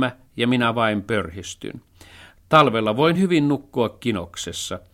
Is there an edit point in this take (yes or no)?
no